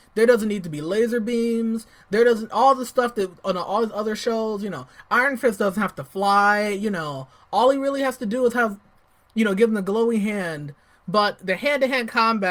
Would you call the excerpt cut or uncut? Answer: uncut